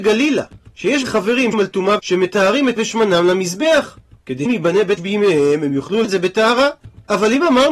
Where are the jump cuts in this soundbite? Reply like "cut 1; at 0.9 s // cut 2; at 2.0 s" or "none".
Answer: cut 1; at 1.0 s // cut 2; at 1.5 s // cut 3; at 2.0 s // cut 4; at 2.8 s // cut 5; at 4.5 s // cut 6; at 5.0 s // cut 7; at 6.0 s